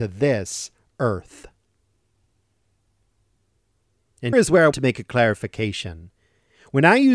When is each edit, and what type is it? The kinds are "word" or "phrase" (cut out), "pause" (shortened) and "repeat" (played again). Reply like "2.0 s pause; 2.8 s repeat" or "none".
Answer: 4.3 s word; 4.7 s word